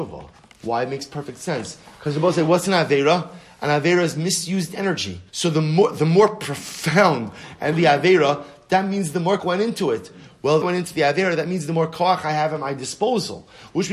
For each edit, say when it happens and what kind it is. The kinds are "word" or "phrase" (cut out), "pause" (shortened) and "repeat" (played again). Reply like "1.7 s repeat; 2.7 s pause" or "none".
5.3 s pause; 7.7 s phrase; 9.4 s word; 10.6 s phrase

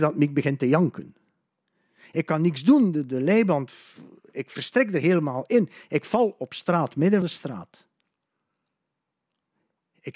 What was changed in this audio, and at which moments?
7.2 s word

